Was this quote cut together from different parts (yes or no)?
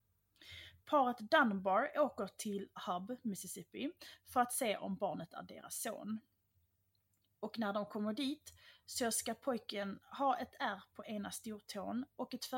no